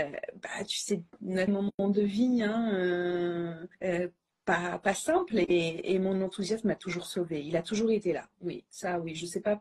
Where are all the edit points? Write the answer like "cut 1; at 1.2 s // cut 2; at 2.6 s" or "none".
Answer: cut 1; at 1.1 s // cut 2; at 1.5 s // cut 3; at 3.7 s